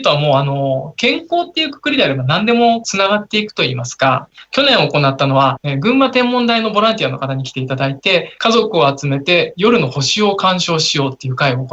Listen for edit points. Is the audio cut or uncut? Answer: uncut